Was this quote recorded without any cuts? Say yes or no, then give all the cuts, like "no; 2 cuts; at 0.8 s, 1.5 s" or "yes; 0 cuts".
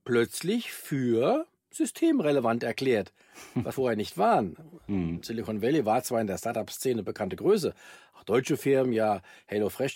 no; 1 cut; at 3.7 s